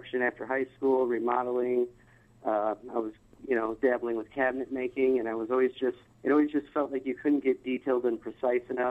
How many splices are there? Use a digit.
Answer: 1